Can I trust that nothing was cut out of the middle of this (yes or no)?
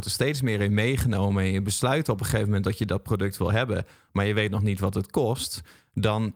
yes